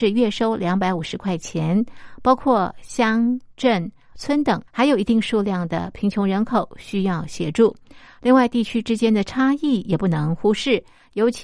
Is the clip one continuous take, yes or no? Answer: no